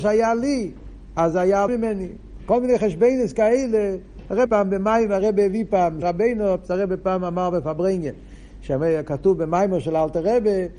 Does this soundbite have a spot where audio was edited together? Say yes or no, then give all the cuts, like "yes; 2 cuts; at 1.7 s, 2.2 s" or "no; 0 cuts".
yes; 3 cuts; at 1.7 s, 4.5 s, 6.0 s